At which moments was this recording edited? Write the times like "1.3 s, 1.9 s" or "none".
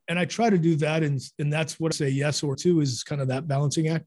1.9 s, 2.5 s